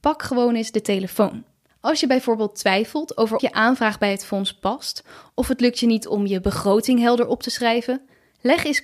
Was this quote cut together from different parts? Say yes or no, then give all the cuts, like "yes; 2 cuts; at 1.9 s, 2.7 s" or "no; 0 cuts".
yes; 1 cut; at 3.4 s